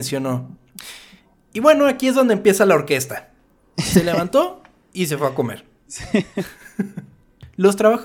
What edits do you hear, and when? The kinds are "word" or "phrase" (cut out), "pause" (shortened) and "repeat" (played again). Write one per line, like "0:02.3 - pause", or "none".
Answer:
none